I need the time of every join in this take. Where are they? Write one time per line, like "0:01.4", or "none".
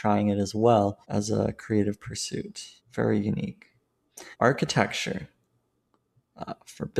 0:01.0
0:02.8
0:04.3